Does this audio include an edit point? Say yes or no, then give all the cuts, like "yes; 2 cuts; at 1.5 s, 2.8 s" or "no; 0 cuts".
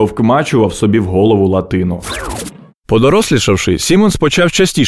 no; 0 cuts